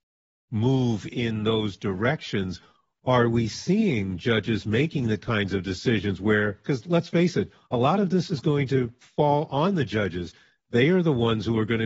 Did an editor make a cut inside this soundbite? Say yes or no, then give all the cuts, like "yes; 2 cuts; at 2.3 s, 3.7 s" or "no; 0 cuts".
no; 0 cuts